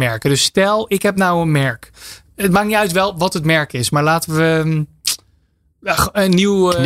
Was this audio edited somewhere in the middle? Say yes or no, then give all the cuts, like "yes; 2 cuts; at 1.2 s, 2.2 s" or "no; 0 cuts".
no; 0 cuts